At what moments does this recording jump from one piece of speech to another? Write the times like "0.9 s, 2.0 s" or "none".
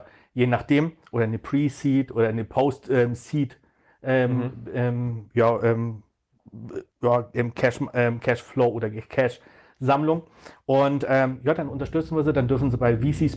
6.9 s